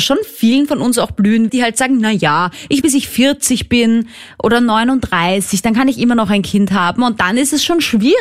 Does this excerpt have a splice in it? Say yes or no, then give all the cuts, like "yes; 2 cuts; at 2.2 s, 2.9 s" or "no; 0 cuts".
yes; 2 cuts; at 1.5 s, 2.8 s